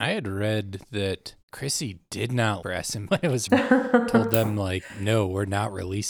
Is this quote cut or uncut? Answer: cut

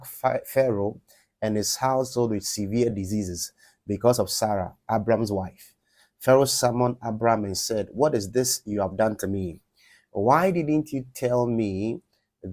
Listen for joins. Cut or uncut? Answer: uncut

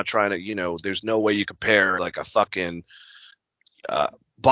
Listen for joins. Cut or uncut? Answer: cut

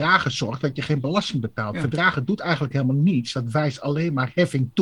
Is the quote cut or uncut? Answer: uncut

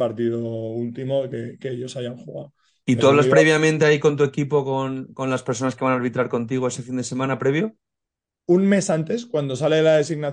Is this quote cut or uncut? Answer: uncut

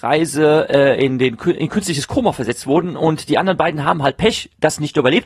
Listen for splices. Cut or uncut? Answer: uncut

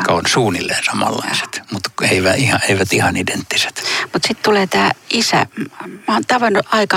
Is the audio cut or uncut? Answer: uncut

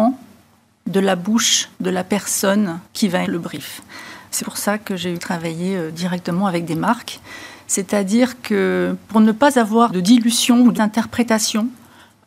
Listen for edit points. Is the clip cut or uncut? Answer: cut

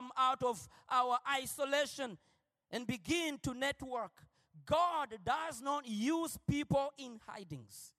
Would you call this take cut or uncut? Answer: uncut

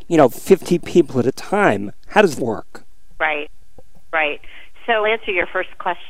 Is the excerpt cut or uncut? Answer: cut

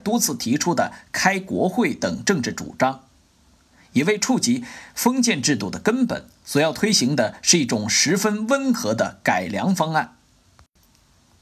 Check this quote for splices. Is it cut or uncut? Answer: uncut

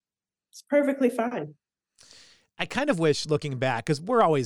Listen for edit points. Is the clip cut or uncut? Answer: uncut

